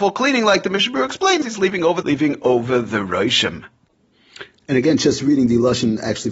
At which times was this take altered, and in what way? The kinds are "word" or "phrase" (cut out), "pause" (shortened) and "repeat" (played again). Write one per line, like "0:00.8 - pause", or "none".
0:01.4 - word
0:02.0 - phrase